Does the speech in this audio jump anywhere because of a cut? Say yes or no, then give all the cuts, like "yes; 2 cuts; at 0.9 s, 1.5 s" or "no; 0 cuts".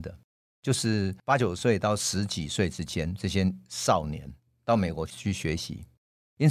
no; 0 cuts